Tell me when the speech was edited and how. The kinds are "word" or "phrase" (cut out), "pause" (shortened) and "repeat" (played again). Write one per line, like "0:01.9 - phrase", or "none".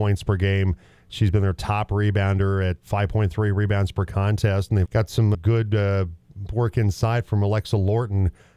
0:02.8 - word
0:04.8 - word
0:05.3 - word
0:06.5 - word